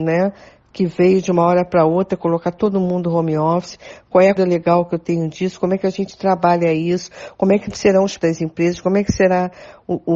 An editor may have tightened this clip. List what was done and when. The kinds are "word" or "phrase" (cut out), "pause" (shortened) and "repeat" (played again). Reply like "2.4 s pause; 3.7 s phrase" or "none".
4.4 s word; 8.2 s word